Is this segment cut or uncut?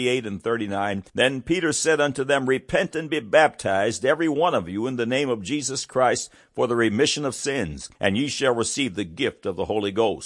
cut